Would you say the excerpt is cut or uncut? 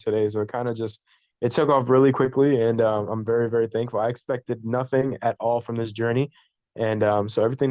uncut